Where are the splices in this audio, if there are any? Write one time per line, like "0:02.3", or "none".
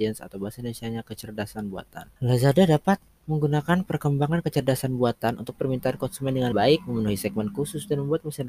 0:02.2
0:05.5
0:06.5